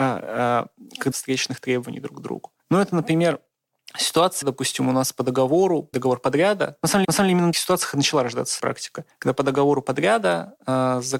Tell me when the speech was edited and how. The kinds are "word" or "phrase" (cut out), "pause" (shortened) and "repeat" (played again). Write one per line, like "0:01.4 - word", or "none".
0:01.1 - phrase
0:02.6 - pause
0:04.4 - word
0:05.9 - word
0:07.0 - repeat
0:07.5 - word
0:08.6 - word
0:09.1 - pause